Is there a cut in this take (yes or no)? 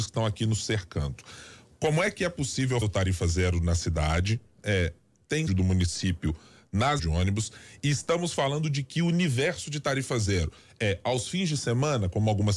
yes